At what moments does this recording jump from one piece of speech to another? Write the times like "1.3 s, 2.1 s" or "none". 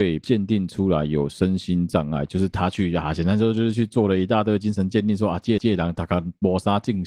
5.6 s